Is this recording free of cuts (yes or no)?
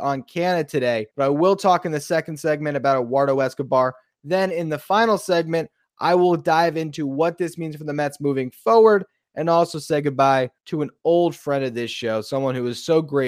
no